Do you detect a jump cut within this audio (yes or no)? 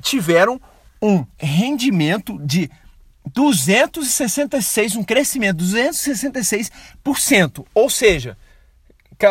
yes